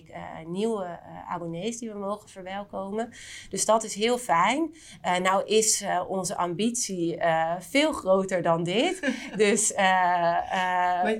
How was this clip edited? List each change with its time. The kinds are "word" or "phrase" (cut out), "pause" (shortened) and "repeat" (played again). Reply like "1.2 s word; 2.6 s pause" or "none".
none

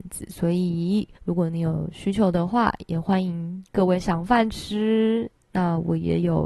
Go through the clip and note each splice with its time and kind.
1.1 s pause

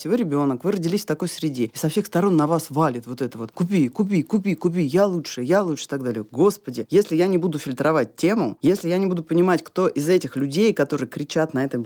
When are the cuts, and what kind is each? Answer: none

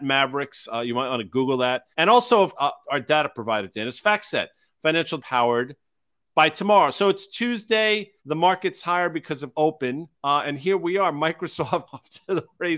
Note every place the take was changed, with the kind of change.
1.9 s pause; 2.6 s word; 5.2 s phrase; 8.2 s pause; 9.5 s phrase; 10.1 s pause; 11.9 s word

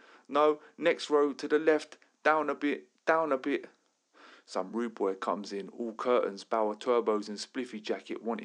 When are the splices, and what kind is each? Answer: none

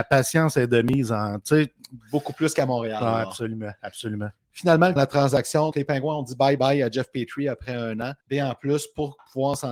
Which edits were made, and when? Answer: 5.0 s phrase; 5.7 s word; 6.6 s word; 8.2 s pause

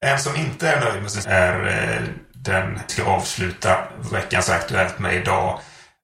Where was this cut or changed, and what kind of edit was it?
1.2 s word; 2.9 s word

